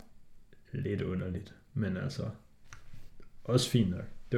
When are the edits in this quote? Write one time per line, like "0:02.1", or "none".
none